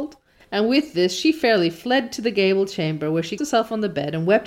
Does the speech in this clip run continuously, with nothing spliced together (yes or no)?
no